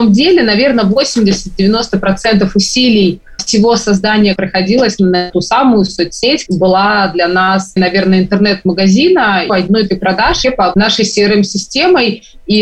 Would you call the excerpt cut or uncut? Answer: cut